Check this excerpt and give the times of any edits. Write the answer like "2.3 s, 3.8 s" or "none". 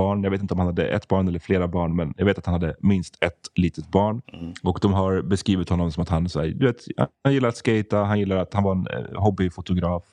4.2 s